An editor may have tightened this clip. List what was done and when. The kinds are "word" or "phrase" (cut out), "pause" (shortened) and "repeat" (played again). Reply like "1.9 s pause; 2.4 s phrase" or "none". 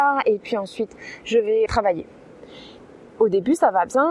1.7 s word